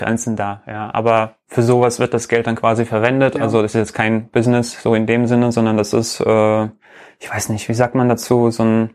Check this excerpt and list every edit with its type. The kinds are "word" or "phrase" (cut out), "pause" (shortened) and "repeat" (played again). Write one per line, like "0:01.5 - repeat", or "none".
none